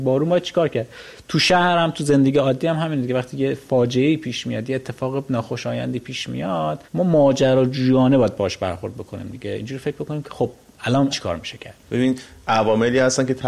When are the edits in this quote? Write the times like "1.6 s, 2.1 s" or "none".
6.9 s, 11.1 s, 11.8 s